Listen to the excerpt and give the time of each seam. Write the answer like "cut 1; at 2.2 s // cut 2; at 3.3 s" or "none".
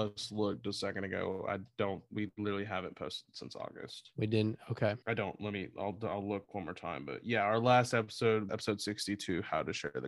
cut 1; at 5.0 s // cut 2; at 8.5 s